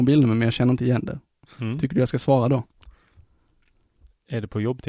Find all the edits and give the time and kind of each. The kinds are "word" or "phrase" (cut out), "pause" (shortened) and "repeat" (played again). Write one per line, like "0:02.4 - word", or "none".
none